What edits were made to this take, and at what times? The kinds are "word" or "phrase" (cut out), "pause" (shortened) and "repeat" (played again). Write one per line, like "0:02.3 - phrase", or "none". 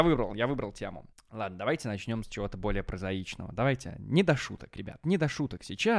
0:01.1 - pause